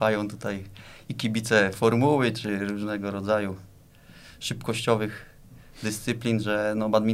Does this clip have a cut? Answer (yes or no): no